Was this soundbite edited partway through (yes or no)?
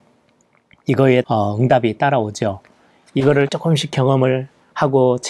yes